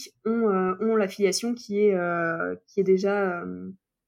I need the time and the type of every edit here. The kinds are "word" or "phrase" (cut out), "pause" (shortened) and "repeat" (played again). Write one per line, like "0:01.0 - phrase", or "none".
none